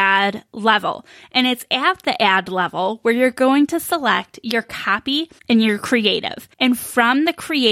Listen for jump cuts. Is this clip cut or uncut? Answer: cut